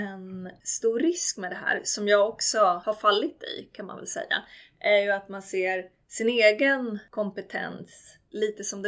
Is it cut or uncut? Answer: uncut